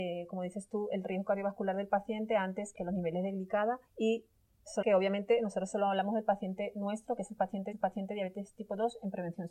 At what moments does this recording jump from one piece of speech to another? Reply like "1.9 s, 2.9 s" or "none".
2.7 s, 3.9 s, 4.8 s, 7.7 s

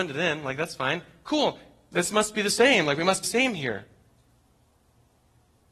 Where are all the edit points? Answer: 3.2 s

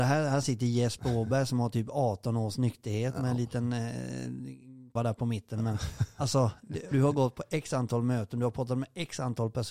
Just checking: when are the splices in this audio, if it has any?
5.0 s, 6.9 s

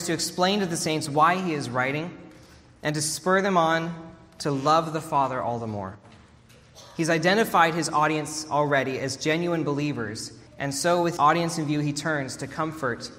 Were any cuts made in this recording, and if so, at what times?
10.5 s, 11.2 s

